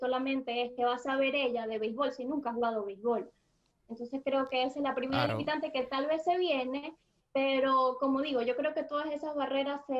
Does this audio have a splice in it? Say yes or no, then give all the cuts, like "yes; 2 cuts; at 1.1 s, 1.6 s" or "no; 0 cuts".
no; 0 cuts